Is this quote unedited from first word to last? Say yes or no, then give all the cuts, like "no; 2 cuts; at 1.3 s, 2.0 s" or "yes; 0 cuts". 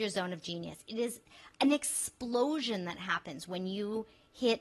yes; 0 cuts